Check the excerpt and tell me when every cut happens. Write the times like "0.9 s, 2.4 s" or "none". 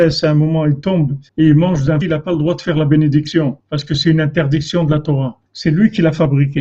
1.3 s, 2.0 s, 3.6 s, 5.5 s